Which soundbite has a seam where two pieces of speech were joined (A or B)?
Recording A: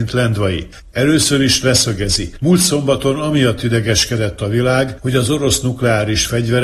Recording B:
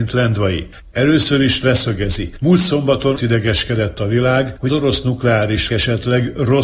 B